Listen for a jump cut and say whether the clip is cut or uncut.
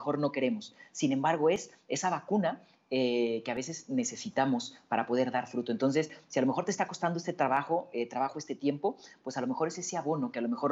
uncut